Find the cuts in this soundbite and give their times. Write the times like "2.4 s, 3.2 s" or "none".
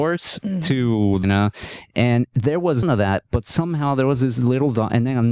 1.2 s, 2.8 s